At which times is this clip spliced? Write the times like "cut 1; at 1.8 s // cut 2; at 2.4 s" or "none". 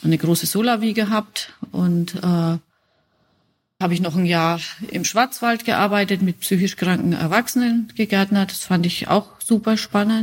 cut 1; at 3.8 s // cut 2; at 4.9 s